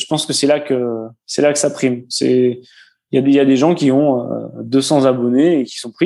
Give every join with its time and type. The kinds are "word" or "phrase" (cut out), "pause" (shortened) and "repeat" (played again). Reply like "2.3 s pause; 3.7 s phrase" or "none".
none